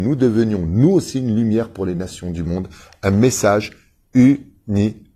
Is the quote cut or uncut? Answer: uncut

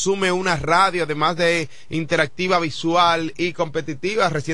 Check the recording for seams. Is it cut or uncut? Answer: uncut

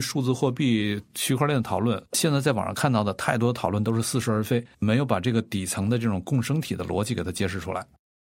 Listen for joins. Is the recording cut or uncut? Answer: cut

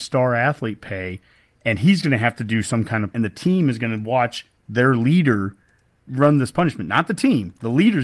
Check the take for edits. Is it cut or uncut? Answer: cut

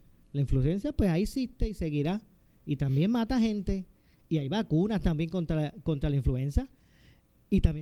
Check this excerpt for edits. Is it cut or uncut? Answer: uncut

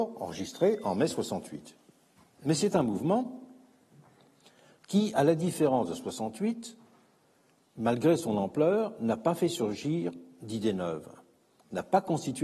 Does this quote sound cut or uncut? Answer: uncut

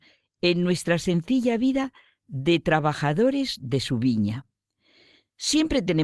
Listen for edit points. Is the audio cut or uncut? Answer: uncut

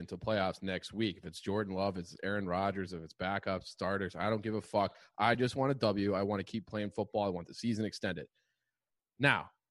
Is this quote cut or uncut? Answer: uncut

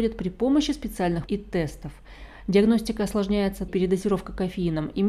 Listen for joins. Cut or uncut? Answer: cut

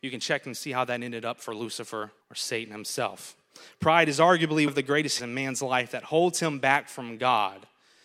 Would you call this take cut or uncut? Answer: cut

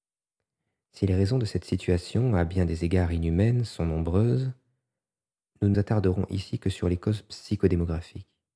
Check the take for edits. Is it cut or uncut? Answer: cut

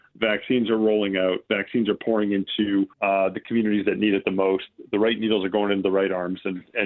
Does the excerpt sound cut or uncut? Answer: cut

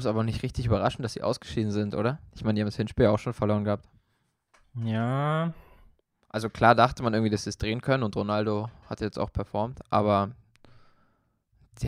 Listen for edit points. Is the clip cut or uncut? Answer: uncut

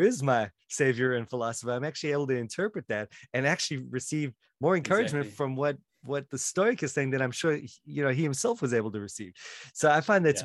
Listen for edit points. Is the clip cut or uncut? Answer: uncut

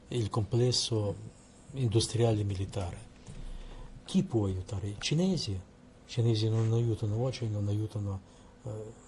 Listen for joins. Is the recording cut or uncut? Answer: uncut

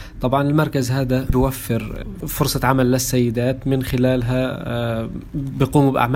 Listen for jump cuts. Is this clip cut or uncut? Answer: uncut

